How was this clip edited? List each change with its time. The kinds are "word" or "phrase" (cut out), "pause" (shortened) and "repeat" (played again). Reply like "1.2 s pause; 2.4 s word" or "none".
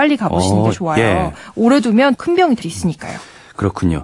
2.2 s word; 2.6 s word